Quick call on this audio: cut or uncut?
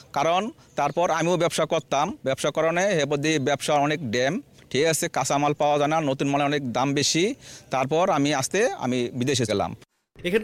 cut